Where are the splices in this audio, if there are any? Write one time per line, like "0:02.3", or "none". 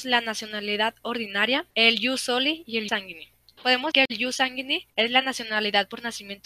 0:01.7
0:02.9
0:03.9
0:04.9